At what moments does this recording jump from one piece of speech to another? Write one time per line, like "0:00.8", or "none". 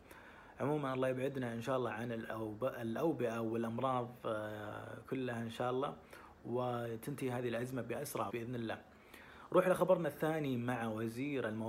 0:08.3